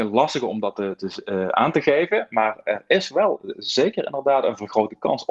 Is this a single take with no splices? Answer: yes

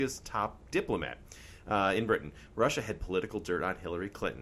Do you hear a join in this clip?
no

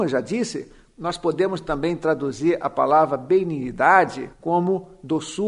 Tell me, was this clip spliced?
yes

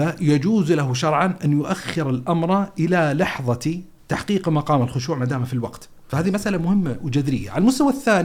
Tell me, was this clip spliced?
yes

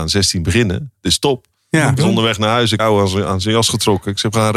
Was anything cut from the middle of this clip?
yes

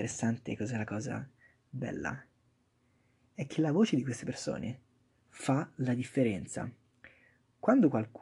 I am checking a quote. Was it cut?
no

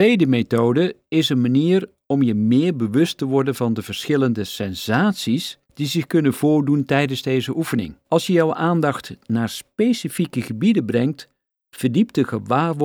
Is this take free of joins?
no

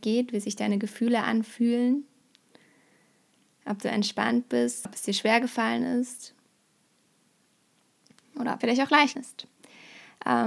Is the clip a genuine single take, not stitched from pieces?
no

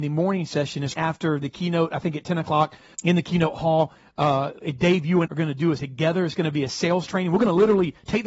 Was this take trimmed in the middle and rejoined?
yes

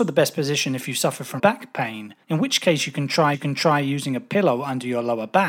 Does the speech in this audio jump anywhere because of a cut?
yes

